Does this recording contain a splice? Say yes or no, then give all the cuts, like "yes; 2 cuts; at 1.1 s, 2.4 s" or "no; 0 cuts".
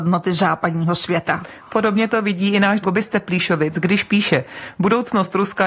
yes; 1 cut; at 2.8 s